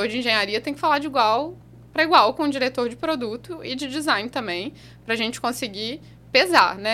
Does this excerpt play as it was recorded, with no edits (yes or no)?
yes